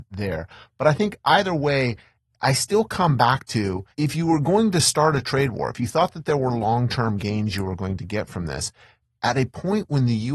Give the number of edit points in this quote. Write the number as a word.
one